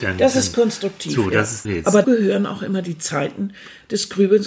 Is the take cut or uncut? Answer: cut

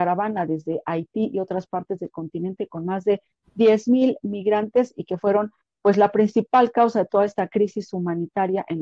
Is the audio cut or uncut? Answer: uncut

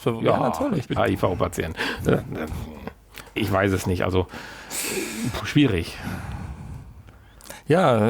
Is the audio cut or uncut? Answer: cut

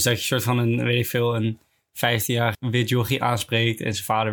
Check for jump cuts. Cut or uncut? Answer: cut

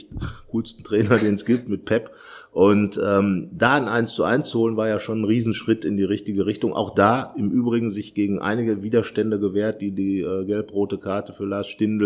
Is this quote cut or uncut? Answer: uncut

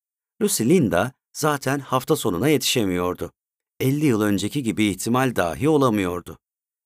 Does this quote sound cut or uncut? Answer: uncut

